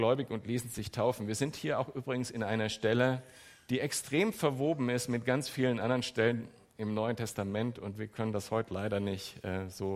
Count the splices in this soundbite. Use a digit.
0